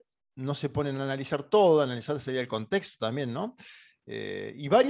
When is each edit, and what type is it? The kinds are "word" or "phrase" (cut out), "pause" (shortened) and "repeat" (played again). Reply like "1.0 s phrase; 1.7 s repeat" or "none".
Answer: none